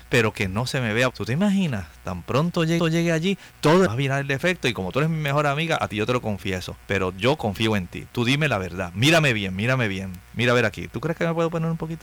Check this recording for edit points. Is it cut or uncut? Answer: cut